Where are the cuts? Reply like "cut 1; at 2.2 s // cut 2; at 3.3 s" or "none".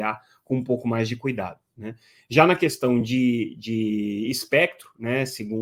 none